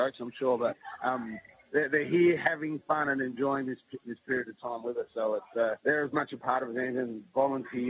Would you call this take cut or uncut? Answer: cut